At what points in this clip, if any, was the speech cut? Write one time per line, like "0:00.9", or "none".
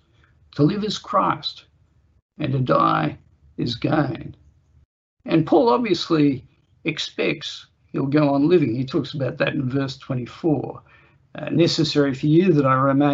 none